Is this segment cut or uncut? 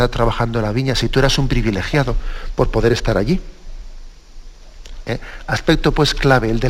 uncut